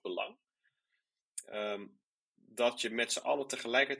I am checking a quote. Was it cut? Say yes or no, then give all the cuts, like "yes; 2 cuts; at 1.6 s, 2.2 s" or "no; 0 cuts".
no; 0 cuts